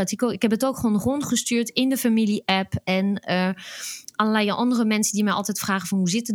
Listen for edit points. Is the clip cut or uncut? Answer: uncut